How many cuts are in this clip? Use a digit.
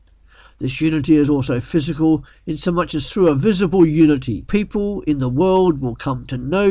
0